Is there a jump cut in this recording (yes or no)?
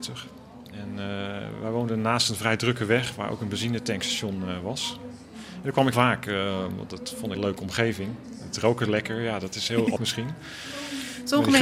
yes